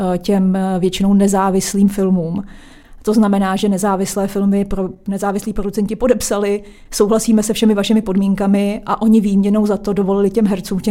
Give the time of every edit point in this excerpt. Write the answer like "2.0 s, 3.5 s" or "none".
none